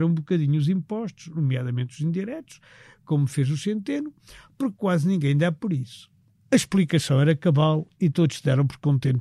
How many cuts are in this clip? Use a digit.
1